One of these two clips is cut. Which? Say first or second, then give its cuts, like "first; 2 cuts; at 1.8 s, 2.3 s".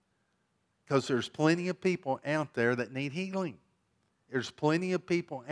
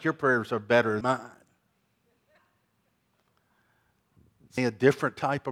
second; 2 cuts; at 1.0 s, 4.6 s